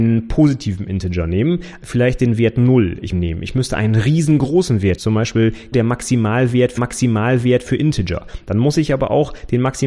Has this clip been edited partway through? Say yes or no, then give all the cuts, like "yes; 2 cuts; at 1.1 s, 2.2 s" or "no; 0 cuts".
yes; 4 cuts; at 3.1 s, 5.0 s, 5.7 s, 6.8 s